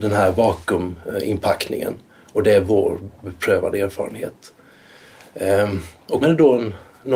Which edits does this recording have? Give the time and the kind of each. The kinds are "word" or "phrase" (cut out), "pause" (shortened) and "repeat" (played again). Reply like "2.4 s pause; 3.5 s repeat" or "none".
6.2 s word